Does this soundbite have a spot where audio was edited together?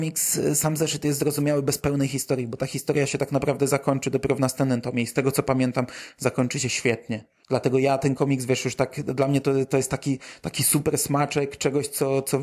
no; 0 cuts

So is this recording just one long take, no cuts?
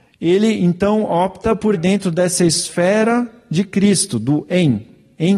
no; 1 cut; at 1.7 s

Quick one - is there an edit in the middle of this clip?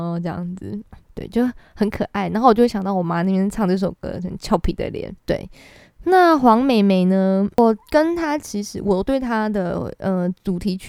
yes; 3 cuts; at 1.0 s, 5.2 s, 7.5 s

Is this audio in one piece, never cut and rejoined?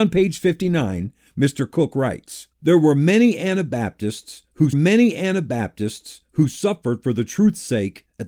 no; 2 cuts; at 2.5 s, 4.7 s

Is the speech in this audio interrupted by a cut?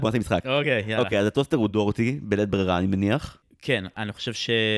no; 0 cuts

